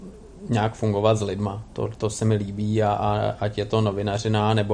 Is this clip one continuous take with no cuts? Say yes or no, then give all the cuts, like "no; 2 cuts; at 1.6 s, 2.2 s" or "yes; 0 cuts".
yes; 0 cuts